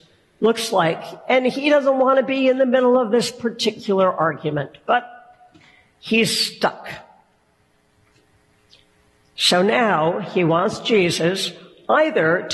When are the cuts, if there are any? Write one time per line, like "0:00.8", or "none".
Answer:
none